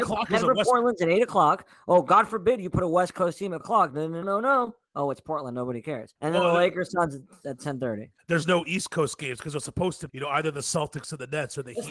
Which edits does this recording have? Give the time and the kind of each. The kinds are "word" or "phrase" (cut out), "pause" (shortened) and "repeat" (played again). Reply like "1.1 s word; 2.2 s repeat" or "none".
3.6 s word; 4.2 s word; 6.2 s pause; 10.1 s word